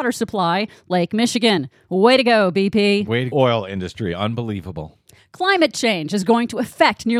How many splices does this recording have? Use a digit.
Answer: 1